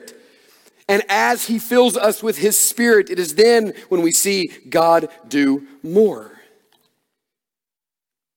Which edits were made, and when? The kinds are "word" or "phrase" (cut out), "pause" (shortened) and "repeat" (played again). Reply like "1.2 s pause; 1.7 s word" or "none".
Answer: none